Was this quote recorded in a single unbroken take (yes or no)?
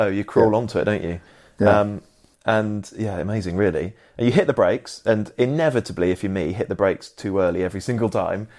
yes